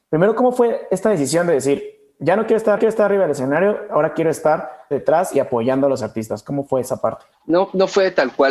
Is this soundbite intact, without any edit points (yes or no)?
no